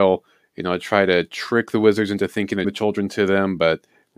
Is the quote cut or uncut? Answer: cut